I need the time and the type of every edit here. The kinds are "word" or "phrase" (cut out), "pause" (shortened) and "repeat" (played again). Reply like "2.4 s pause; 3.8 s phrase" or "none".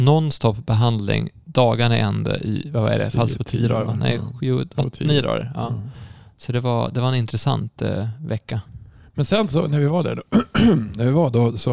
none